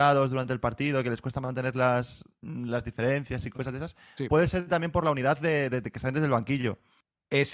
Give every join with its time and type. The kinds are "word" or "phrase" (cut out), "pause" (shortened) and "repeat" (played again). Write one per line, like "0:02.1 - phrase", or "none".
none

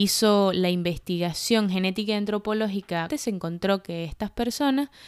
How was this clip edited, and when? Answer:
0:03.1 - word

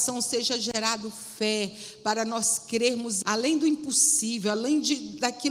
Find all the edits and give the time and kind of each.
0:03.2 - word

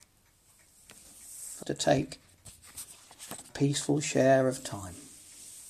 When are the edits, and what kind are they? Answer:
0:01.6 - word
0:03.5 - word

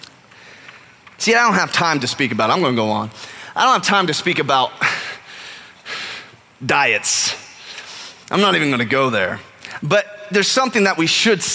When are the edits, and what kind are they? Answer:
none

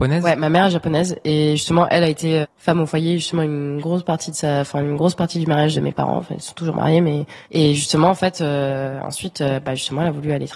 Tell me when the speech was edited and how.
0:02.4 - word
0:05.7 - word
0:07.4 - pause

